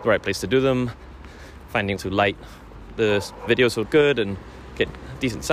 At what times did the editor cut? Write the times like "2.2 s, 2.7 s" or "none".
2.0 s, 3.5 s, 3.8 s